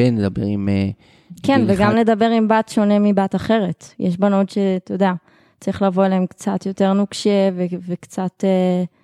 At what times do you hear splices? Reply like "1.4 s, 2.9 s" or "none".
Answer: none